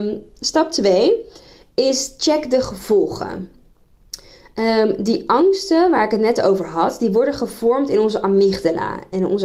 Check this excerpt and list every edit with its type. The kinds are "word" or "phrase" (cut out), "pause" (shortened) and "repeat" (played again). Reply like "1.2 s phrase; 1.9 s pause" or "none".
none